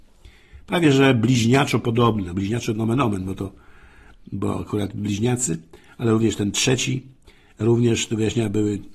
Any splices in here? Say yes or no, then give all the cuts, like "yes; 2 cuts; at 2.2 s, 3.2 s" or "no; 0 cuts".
no; 0 cuts